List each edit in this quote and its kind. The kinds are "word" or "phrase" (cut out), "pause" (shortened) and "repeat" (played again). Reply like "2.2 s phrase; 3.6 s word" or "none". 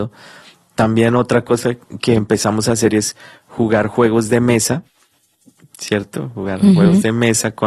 none